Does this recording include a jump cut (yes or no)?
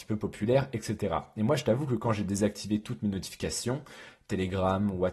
no